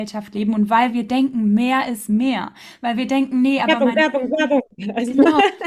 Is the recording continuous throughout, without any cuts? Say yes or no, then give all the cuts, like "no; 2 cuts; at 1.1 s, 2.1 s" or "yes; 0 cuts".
yes; 0 cuts